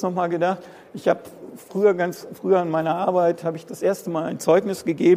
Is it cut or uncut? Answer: uncut